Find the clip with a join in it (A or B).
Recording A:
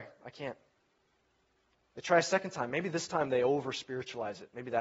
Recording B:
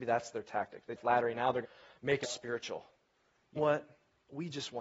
B